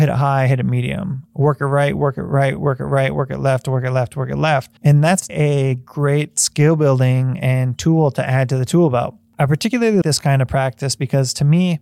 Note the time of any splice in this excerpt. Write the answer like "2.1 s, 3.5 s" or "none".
4.8 s, 5.3 s, 10.0 s